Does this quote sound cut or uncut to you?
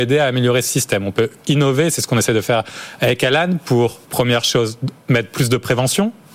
cut